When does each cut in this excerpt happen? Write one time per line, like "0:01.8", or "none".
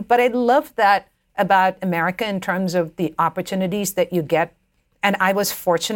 none